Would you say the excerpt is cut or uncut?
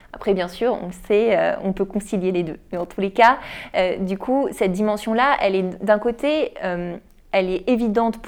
uncut